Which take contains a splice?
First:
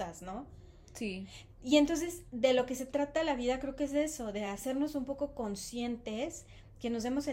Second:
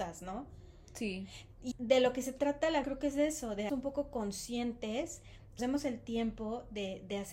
second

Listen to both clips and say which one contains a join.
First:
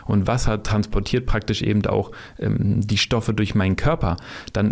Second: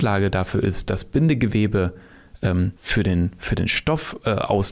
second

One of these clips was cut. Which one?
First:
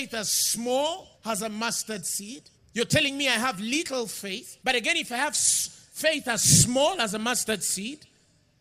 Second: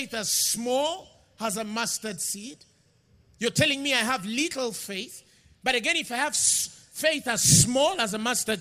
first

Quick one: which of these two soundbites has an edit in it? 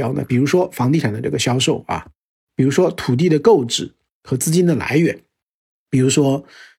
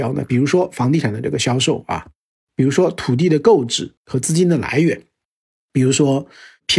second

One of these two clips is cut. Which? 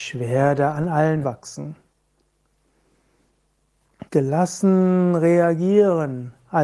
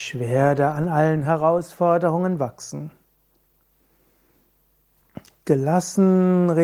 first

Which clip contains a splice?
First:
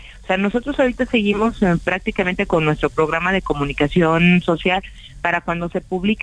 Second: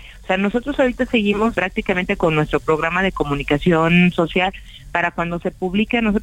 second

